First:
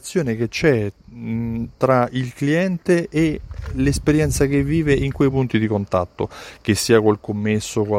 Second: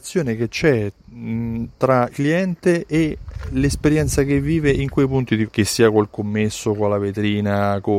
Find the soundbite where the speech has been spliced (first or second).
second